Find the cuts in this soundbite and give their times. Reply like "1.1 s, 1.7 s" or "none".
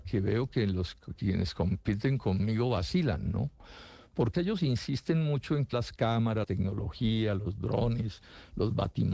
1.2 s, 4.3 s, 5.7 s, 6.4 s